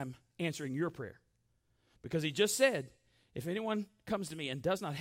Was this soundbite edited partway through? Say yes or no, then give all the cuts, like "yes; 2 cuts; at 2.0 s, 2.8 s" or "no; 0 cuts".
no; 0 cuts